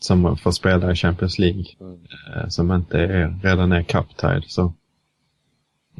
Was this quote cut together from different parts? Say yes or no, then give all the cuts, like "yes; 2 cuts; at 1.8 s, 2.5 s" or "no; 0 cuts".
yes; 1 cut; at 1.7 s